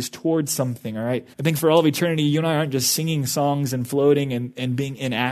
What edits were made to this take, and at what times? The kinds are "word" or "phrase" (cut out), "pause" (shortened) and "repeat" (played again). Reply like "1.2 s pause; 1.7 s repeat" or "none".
1.3 s pause